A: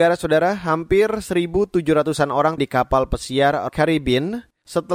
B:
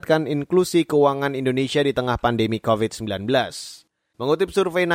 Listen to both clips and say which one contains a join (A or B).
A